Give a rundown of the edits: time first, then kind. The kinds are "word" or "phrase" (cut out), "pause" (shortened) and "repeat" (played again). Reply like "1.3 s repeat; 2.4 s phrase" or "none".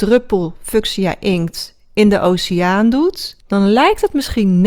3.4 s pause